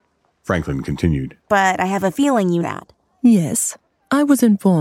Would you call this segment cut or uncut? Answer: cut